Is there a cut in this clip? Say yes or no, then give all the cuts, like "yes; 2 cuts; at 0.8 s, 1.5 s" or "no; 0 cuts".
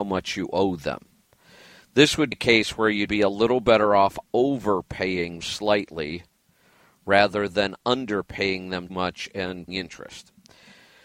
yes; 5 cuts; at 2.3 s, 3.1 s, 5.4 s, 8.9 s, 9.7 s